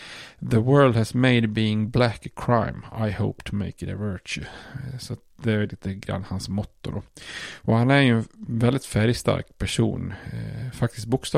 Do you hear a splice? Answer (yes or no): no